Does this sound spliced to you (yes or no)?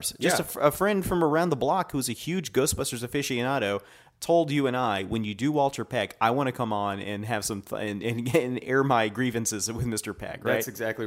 no